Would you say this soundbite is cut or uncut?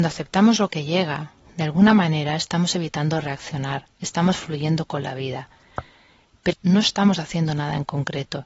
cut